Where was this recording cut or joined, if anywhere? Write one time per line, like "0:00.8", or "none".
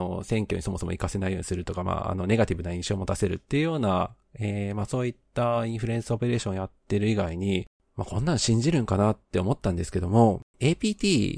0:07.7
0:10.5